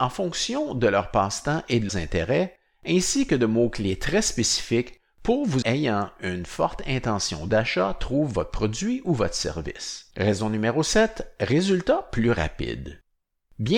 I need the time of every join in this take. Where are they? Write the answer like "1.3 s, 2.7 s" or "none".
1.9 s, 5.6 s, 10.1 s